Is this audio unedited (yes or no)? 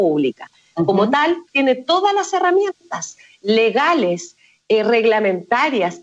yes